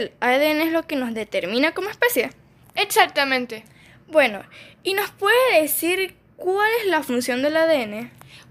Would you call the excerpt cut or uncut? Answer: uncut